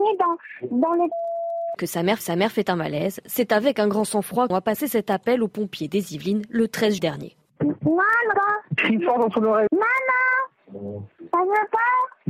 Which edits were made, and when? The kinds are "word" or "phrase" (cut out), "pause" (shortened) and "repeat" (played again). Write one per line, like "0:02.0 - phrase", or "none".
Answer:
0:01.8 - word
0:02.2 - repeat
0:04.5 - phrase
0:07.0 - word
0:08.3 - word
0:09.7 - word